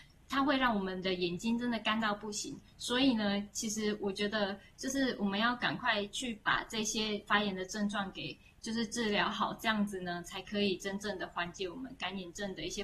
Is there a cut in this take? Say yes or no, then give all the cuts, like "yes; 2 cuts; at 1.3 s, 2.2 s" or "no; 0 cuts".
no; 0 cuts